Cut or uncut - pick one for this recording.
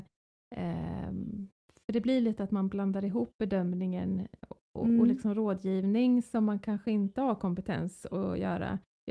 uncut